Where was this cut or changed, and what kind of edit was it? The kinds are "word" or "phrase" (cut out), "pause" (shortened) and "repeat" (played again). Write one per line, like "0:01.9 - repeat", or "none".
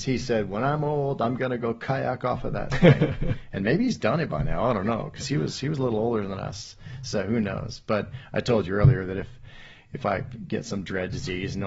none